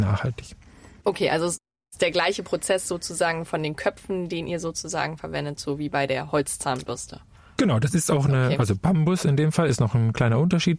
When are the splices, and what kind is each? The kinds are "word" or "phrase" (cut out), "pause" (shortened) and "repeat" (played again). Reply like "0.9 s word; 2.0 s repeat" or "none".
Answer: none